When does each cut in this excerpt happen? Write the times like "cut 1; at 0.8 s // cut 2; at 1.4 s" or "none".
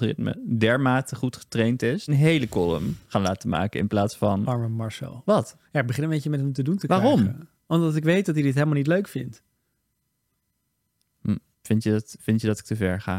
cut 1; at 2.1 s // cut 2; at 5.6 s // cut 3; at 11.5 s